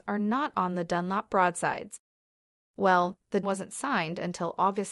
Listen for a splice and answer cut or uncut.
cut